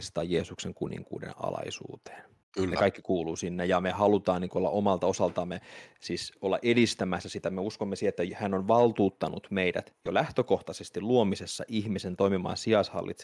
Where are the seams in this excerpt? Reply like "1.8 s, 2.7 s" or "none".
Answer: 2.4 s